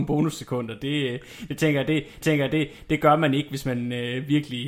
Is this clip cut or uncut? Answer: cut